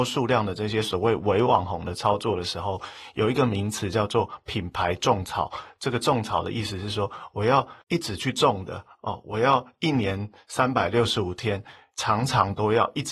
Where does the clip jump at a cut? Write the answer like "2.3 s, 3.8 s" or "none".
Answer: 7.8 s